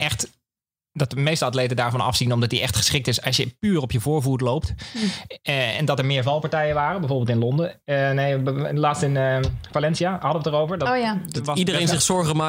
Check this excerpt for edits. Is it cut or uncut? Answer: uncut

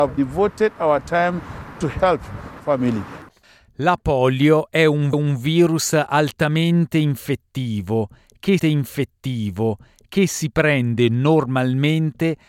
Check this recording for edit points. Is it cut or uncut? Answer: cut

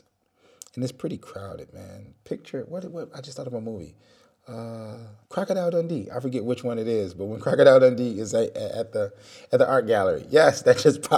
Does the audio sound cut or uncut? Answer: cut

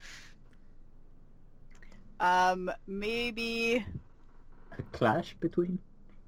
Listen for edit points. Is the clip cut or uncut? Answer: uncut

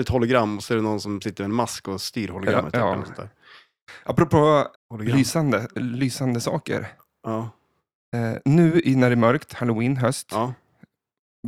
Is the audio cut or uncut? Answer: cut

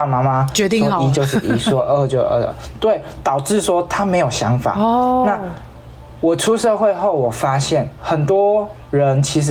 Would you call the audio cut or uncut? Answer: cut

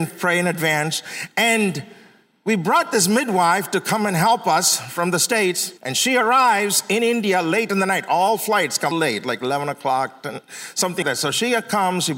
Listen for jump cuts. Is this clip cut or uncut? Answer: cut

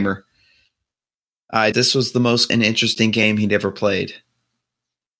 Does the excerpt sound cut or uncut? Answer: cut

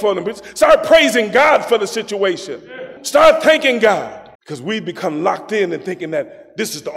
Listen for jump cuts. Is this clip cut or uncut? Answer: cut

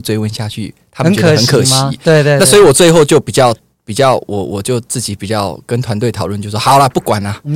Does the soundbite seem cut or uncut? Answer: uncut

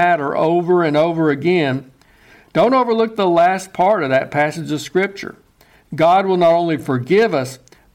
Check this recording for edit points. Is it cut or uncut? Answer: uncut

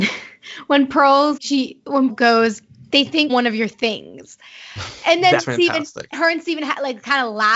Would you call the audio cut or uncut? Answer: cut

